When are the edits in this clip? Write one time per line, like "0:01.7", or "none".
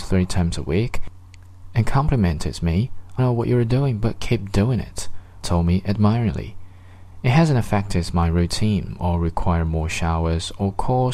0:03.2
0:05.4